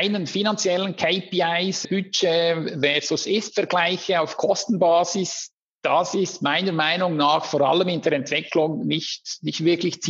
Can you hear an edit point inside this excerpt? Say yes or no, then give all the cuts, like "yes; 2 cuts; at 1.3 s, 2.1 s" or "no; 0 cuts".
no; 0 cuts